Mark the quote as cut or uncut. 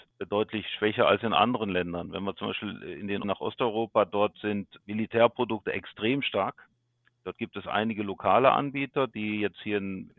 cut